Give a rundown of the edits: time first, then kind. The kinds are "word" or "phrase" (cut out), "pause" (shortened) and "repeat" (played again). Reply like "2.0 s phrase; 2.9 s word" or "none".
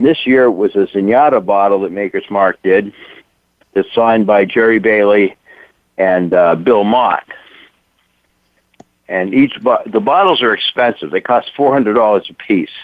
none